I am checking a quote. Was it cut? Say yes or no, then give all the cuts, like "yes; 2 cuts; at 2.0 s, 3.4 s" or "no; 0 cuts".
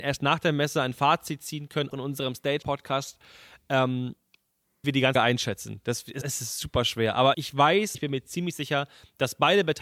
yes; 7 cuts; at 1.9 s, 2.6 s, 4.8 s, 5.1 s, 6.2 s, 7.3 s, 7.9 s